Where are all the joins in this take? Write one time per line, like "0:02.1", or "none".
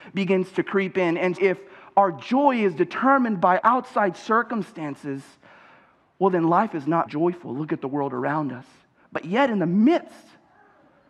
0:01.4
0:03.6
0:07.1